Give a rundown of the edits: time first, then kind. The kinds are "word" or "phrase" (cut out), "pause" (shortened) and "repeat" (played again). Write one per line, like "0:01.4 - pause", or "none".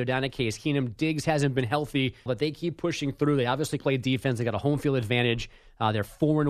0:02.3 - word
0:03.8 - word